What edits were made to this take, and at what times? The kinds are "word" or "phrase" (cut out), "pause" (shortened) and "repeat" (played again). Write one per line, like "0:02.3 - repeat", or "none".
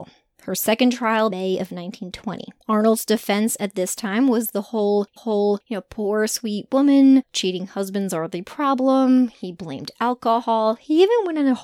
0:01.3 - phrase
0:02.6 - pause
0:05.2 - repeat